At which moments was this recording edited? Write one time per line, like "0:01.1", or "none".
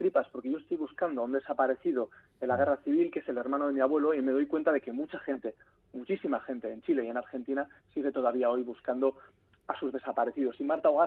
none